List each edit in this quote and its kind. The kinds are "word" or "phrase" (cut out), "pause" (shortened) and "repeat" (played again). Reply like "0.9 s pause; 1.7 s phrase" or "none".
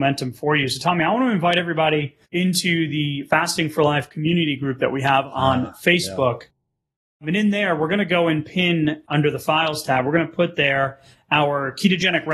2.2 s pause